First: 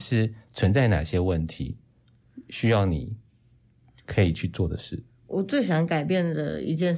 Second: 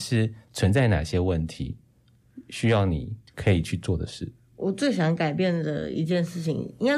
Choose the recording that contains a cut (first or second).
second